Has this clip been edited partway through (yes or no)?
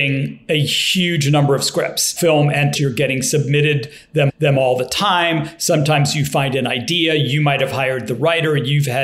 yes